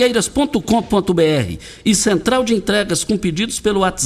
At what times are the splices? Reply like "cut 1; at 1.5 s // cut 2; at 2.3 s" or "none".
none

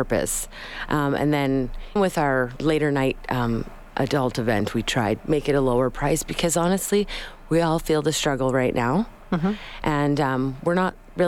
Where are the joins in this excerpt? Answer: cut 1; at 2.0 s // cut 2; at 2.6 s // cut 3; at 5.2 s

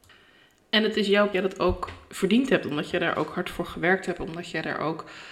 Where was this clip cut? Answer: cut 1; at 1.3 s

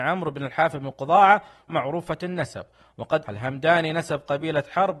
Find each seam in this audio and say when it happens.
cut 1; at 1.7 s // cut 2; at 3.3 s

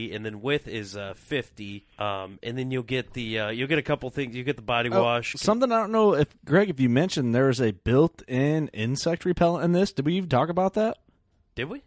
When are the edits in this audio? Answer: cut 1; at 1.9 s

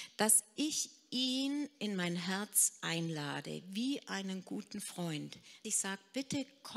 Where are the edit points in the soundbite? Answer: cut 1; at 5.6 s

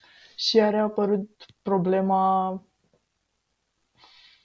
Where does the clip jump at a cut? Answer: cut 1; at 1.5 s

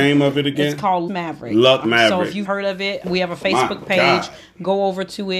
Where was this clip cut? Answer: cut 1; at 1.1 s // cut 2; at 1.8 s // cut 3; at 2.4 s // cut 4; at 3.0 s

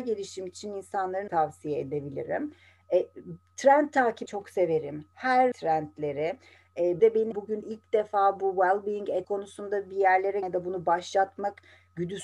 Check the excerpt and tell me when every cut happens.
cut 1; at 1.3 s // cut 2; at 4.3 s // cut 3; at 5.5 s // cut 4; at 7.0 s // cut 5; at 7.3 s // cut 6; at 7.6 s // cut 7; at 9.2 s // cut 8; at 10.4 s

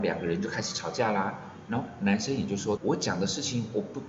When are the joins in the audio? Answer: cut 1; at 2.8 s

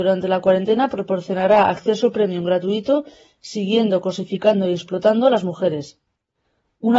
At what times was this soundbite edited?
none

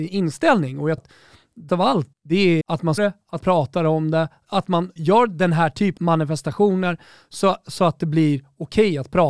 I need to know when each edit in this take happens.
cut 1; at 1.0 s // cut 2; at 1.7 s // cut 3; at 2.1 s // cut 4; at 2.6 s // cut 5; at 3.0 s // cut 6; at 3.4 s // cut 7; at 4.4 s // cut 8; at 5.0 s // cut 9; at 6.0 s

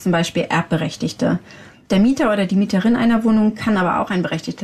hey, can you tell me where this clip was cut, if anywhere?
none

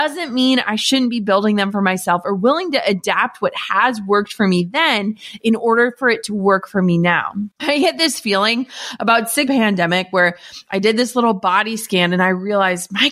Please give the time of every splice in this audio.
cut 1; at 7.5 s // cut 2; at 9.5 s

